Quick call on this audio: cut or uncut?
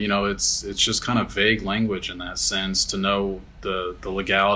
uncut